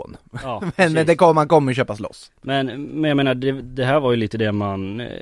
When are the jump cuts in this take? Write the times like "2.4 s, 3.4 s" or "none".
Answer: none